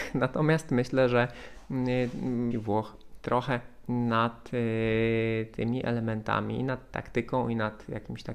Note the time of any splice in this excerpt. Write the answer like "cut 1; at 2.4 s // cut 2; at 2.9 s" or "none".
cut 1; at 2.5 s